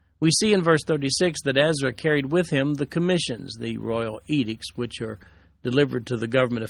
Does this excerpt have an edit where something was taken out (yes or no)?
no